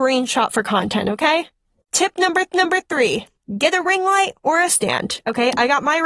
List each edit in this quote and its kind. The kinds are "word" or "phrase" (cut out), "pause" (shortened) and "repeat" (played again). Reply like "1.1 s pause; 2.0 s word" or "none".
2.5 s repeat; 4.4 s pause; 4.7 s word

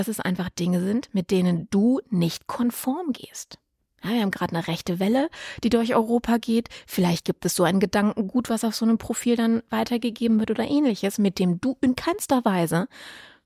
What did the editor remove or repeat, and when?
none

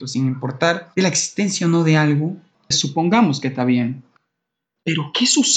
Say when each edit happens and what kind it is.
2.7 s word

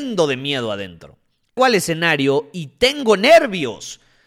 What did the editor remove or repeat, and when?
1.6 s word

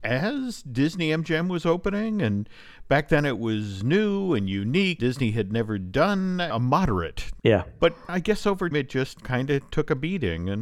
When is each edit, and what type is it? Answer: 5.0 s word; 8.7 s word

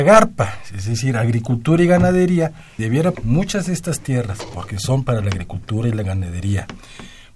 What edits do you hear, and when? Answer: 2.8 s word; 3.1 s word

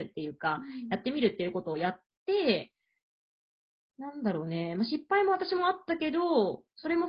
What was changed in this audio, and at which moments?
none

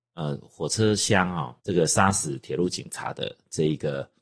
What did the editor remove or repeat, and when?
1.6 s pause

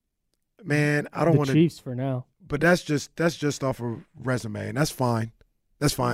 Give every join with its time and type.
2.3 s pause

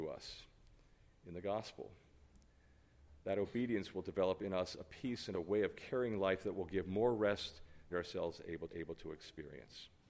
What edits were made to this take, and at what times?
5.3 s phrase; 7.9 s phrase; 8.7 s repeat

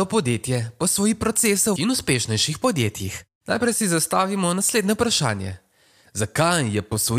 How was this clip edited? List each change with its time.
1.8 s word

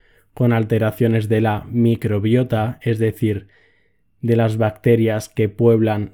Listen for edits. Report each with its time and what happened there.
none

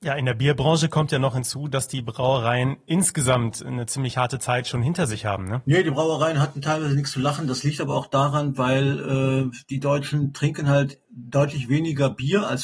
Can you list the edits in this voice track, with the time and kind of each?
11.0 s pause

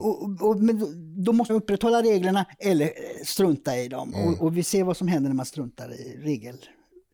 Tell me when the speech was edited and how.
1.5 s word

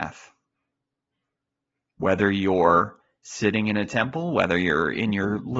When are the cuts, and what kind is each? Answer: 3.0 s pause

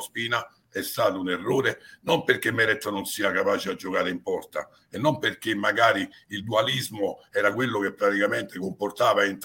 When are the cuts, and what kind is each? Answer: none

